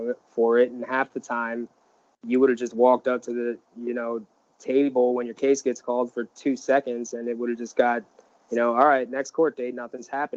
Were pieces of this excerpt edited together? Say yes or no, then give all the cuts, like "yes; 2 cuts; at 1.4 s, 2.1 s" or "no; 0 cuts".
no; 0 cuts